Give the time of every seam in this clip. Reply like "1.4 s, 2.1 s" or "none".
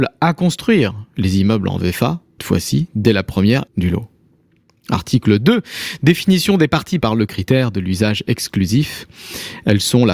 2.4 s, 3.7 s, 7.0 s